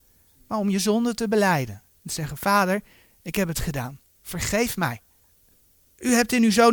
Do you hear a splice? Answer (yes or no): yes